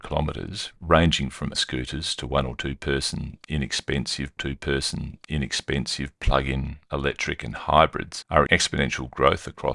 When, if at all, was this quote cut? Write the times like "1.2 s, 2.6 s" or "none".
1.5 s, 4.4 s, 8.5 s